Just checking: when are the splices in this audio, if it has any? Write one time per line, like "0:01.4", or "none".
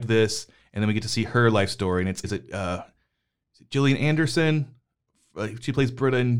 0:02.2